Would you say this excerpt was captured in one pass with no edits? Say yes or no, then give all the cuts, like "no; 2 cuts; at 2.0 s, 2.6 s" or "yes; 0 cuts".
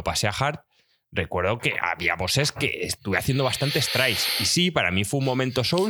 yes; 0 cuts